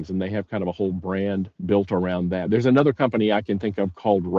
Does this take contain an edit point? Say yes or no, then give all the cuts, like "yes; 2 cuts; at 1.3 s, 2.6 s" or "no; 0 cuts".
yes; 1 cut; at 1.6 s